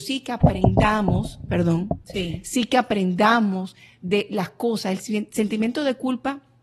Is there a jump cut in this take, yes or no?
no